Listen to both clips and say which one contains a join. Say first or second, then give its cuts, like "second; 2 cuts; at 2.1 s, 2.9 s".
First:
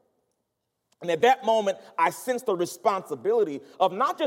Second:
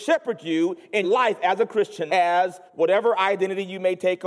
second; 3 cuts; at 1.0 s, 2.1 s, 2.7 s